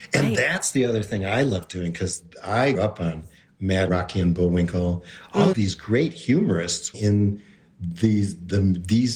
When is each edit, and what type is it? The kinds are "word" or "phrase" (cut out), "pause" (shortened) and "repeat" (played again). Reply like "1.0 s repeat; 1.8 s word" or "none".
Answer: 2.7 s word; 3.9 s word; 5.5 s word; 6.9 s word